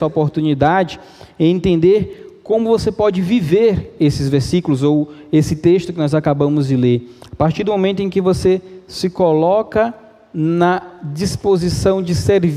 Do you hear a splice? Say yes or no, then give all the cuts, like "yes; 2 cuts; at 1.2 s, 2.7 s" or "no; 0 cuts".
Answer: no; 0 cuts